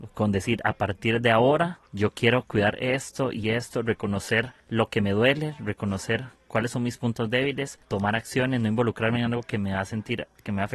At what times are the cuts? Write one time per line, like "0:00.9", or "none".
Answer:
0:01.9
0:04.6
0:07.8

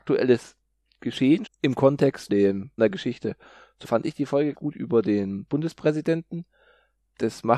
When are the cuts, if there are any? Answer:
0:01.5
0:02.3
0:02.8
0:03.8
0:04.5

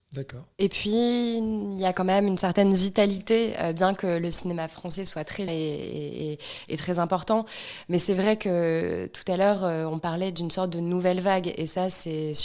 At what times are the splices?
0:05.5

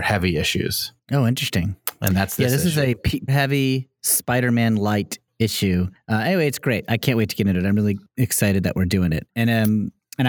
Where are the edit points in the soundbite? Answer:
0:03.3

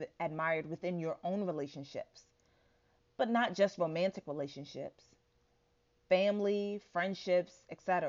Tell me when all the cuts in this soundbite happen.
none

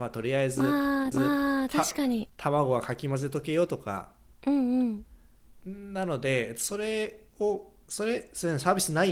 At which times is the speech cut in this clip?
0:01.1

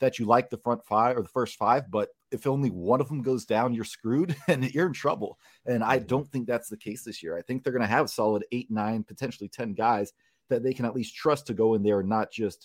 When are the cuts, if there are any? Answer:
none

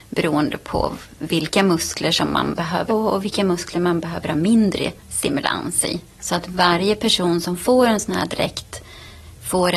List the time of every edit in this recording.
0:02.9
0:05.0
0:06.1

